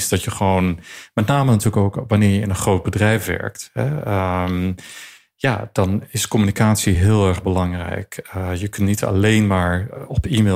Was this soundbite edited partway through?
no; 0 cuts

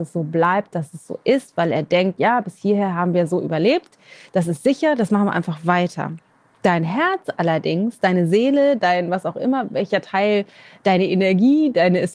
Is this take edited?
no; 0 cuts

